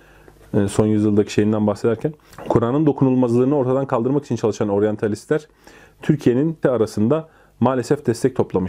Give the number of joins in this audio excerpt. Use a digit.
1